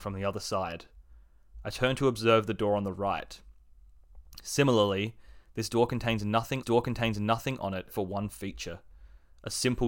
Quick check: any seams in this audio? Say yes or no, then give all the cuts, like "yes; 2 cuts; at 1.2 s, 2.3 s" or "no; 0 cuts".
yes; 2 cuts; at 6.6 s, 7.9 s